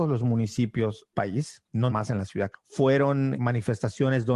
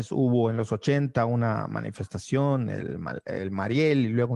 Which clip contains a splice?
first; 4 cuts; at 1.1 s, 1.9 s, 2.5 s, 3.4 s

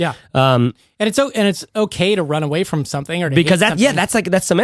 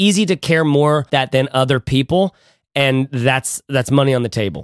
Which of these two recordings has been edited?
second; 1 cut; at 1.1 s

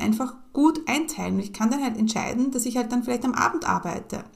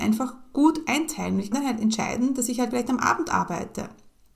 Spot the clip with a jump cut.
second; 2 cuts; at 1.5 s, 2.7 s

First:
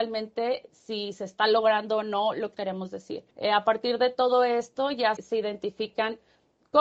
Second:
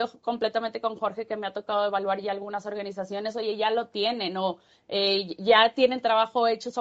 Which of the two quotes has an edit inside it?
first; 3 cuts; at 2.5 s, 3.3 s, 5.2 s

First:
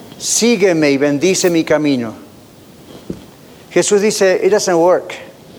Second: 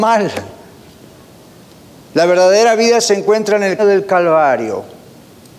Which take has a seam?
second; 1 cut; at 3.8 s

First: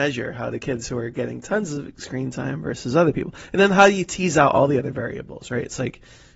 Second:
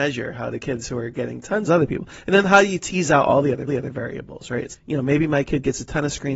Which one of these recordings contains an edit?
second; 3 cuts; at 1.7 s, 3.7 s, 4.7 s

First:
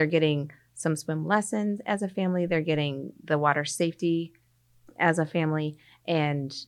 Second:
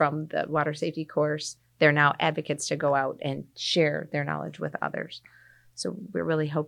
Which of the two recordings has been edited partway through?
second; 1 cut; at 3.5 s

